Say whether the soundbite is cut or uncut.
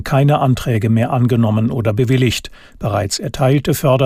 uncut